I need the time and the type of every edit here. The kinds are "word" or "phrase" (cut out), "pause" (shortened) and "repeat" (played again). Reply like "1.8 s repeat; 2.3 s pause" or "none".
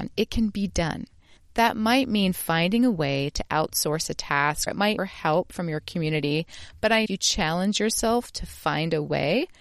4.7 s word; 5.0 s phrase; 7.1 s phrase